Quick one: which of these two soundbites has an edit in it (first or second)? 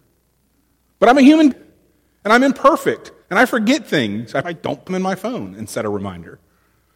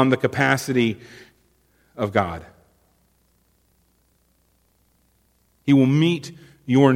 first